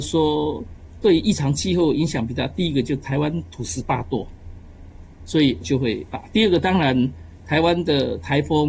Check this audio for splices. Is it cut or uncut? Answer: cut